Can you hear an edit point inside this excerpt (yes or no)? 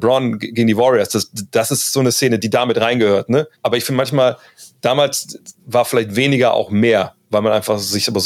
yes